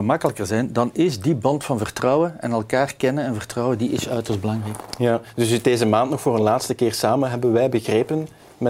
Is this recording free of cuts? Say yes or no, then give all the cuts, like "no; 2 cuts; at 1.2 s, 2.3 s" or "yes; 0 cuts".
yes; 0 cuts